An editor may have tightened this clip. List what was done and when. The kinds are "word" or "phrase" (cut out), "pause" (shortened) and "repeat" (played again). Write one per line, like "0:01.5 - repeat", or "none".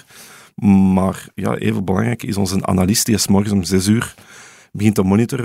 none